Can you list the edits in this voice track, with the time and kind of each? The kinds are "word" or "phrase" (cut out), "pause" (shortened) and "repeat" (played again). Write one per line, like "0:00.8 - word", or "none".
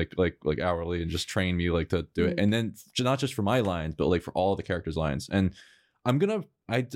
none